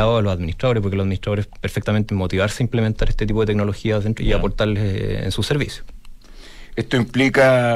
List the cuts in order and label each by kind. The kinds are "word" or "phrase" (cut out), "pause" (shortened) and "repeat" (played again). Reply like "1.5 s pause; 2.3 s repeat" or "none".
2.1 s word; 4.2 s phrase